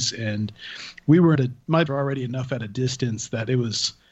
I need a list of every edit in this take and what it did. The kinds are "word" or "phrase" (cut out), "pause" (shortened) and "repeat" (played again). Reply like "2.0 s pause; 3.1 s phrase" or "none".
1.3 s phrase; 1.9 s word

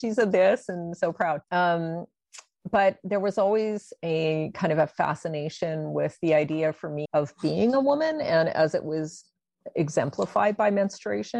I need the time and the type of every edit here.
1.4 s pause; 7.1 s word

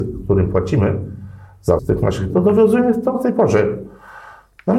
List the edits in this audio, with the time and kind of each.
1.8 s word; 2.3 s word; 3.1 s word

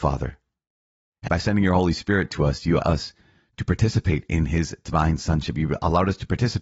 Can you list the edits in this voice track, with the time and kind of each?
1.3 s word; 2.8 s word

